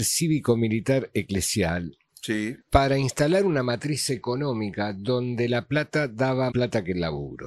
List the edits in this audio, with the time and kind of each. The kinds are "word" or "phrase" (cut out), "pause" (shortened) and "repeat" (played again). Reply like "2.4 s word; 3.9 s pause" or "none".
2.6 s pause; 6.5 s word